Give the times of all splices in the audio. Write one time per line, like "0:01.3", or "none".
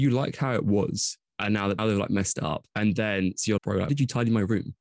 0:01.3
0:01.8
0:02.7
0:03.6
0:03.9